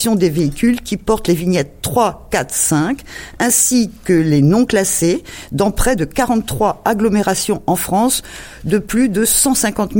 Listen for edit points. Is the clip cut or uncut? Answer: uncut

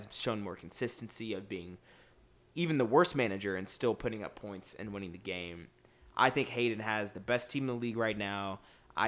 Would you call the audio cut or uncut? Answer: uncut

